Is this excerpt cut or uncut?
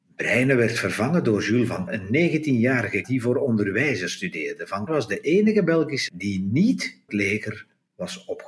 cut